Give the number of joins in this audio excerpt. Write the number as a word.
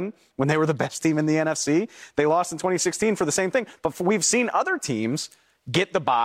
zero